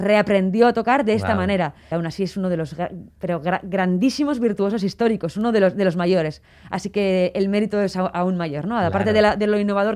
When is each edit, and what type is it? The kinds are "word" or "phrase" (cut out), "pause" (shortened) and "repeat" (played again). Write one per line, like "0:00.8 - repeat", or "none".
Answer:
0:01.9 - word